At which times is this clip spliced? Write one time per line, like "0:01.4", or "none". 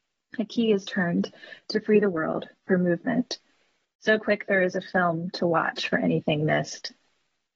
none